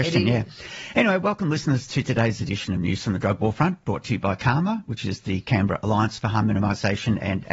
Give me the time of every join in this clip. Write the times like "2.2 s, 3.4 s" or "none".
none